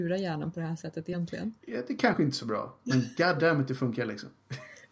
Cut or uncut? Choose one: uncut